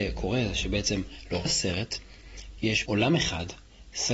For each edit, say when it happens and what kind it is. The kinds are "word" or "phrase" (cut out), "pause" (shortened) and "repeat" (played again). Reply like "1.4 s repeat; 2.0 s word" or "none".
1.5 s word; 2.9 s word